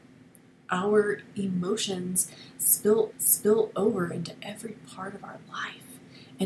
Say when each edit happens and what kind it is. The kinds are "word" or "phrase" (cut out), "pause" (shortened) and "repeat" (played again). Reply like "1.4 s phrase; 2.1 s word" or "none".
3.1 s repeat

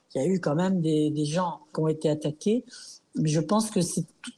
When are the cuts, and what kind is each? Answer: 1.7 s word

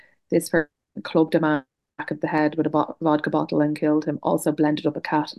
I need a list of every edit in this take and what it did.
none

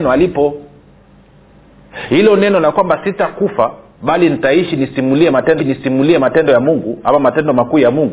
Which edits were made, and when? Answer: 5.6 s repeat

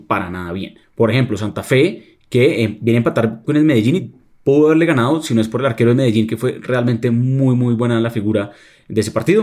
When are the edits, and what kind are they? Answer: none

